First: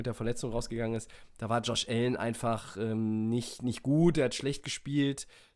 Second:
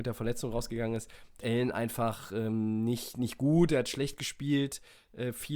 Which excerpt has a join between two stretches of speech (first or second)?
second